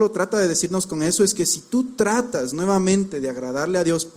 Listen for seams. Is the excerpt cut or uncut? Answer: uncut